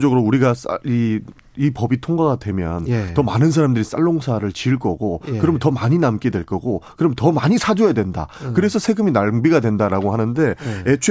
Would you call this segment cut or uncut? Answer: cut